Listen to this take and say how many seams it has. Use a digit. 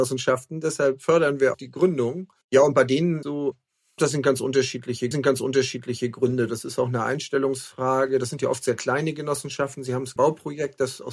6